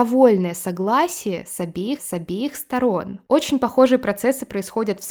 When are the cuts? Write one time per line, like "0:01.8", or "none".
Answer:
0:02.0